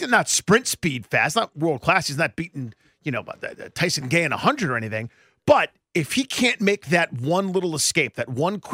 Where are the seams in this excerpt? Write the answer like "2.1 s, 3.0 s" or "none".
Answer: none